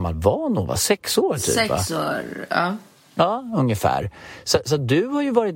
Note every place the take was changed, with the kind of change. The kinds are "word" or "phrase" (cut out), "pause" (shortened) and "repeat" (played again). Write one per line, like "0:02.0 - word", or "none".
none